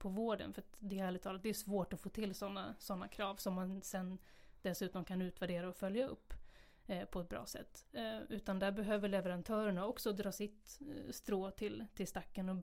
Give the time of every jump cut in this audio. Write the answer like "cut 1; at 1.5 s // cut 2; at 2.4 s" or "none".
none